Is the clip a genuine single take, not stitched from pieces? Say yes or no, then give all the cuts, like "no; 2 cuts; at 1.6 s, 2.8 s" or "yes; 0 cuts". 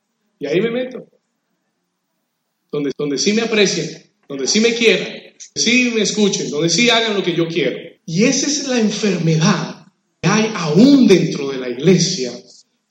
no; 5 cuts; at 2.9 s, 4.2 s, 5.6 s, 8.0 s, 10.2 s